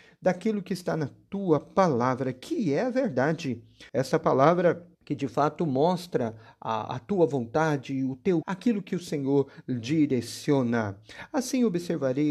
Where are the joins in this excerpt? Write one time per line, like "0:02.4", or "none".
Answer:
0:03.9
0:04.9
0:08.4